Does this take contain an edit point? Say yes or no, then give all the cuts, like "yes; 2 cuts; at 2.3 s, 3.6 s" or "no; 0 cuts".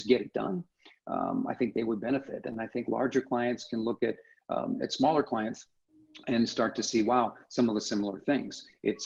no; 0 cuts